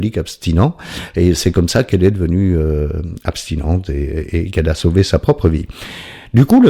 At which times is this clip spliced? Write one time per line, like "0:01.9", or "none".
none